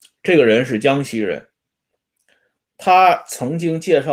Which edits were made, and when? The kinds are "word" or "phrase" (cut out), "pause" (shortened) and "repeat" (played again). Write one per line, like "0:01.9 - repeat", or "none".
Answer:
none